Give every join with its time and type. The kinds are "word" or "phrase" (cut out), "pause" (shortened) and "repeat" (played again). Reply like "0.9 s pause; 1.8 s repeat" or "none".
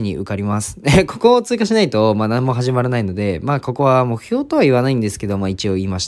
none